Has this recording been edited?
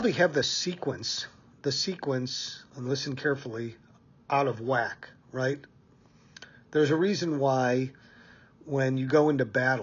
no; 0 cuts

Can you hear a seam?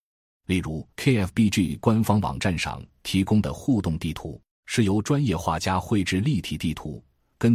yes; 2 cuts; at 0.9 s, 4.5 s

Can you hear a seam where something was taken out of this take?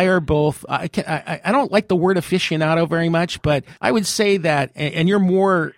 yes; 1 cut; at 3.8 s

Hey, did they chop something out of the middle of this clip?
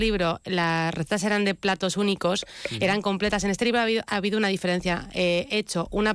no; 0 cuts

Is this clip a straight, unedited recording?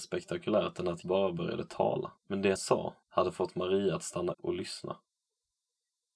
no; 5 cuts; at 1.0 s, 2.2 s, 2.6 s, 3.0 s, 4.3 s

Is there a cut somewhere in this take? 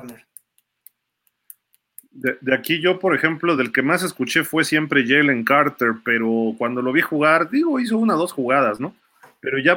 no; 0 cuts

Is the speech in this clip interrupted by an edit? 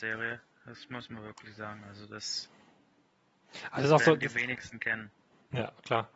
no; 0 cuts

